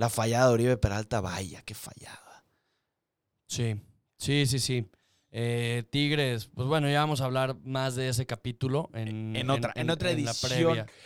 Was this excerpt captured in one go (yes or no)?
yes